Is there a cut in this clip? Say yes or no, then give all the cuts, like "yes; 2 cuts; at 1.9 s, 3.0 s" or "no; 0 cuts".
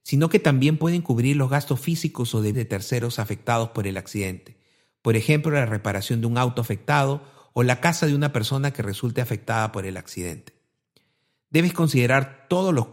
yes; 1 cut; at 2.5 s